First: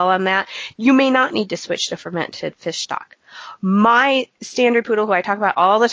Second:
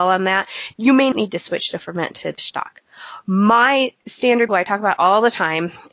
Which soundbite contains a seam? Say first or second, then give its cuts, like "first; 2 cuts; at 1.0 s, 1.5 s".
second; 3 cuts; at 1.1 s, 2.4 s, 4.5 s